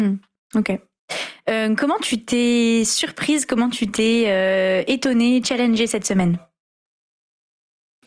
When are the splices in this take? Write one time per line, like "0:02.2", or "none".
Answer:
none